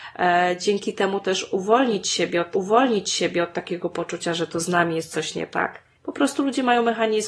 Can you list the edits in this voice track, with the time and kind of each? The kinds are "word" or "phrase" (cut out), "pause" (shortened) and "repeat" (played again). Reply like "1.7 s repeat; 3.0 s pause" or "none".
2.5 s repeat; 5.9 s pause